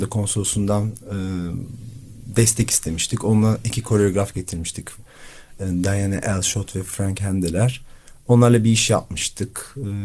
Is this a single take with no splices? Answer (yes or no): yes